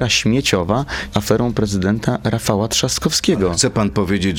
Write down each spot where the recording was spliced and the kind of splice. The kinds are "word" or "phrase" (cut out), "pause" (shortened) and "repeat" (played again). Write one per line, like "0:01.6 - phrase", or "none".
0:01.1 - word